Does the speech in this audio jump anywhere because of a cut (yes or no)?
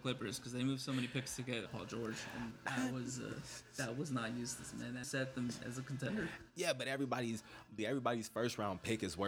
yes